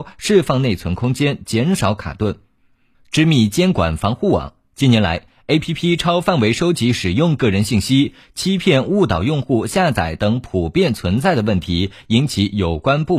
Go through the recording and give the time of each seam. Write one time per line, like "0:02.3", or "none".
none